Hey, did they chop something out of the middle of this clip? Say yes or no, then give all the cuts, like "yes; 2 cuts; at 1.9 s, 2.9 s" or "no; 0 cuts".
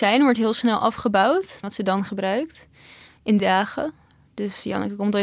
yes; 2 cuts; at 1.6 s, 3.4 s